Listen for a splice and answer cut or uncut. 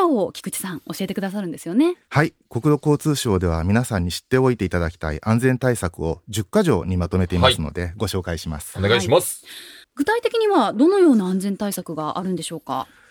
cut